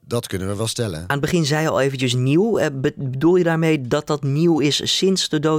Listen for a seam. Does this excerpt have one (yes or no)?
no